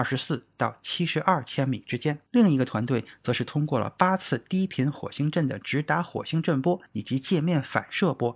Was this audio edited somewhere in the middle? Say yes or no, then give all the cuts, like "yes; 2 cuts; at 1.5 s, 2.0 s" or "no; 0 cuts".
yes; 2 cuts; at 2.3 s, 6.9 s